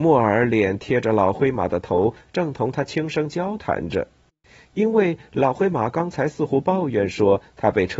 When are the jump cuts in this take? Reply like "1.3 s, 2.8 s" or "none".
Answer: none